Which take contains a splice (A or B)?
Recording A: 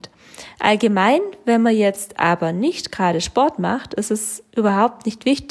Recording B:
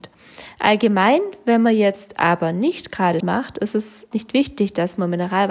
B